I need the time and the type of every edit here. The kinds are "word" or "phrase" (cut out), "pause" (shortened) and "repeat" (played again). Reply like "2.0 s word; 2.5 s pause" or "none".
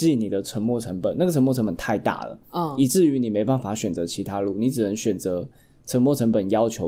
none